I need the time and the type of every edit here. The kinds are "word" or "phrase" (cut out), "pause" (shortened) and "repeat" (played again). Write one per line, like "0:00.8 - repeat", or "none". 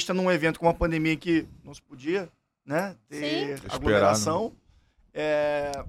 none